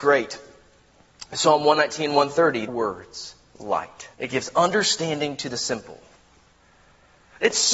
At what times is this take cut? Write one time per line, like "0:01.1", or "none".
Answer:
0:02.7
0:03.5
0:04.1